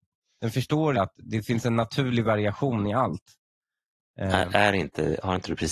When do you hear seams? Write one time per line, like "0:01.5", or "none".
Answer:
0:00.9